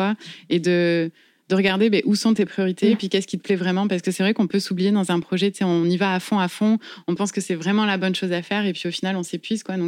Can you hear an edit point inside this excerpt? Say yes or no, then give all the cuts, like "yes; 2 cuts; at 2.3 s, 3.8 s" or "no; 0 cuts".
no; 0 cuts